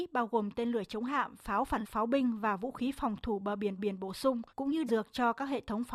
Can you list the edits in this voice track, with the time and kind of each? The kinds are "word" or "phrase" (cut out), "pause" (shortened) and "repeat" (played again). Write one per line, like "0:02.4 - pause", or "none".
0:01.8 - word
0:03.8 - repeat
0:04.5 - pause
0:04.9 - word